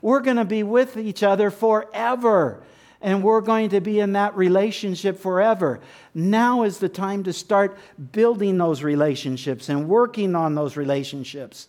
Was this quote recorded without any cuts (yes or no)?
yes